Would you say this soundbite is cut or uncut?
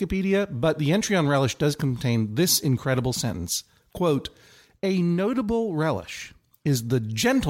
uncut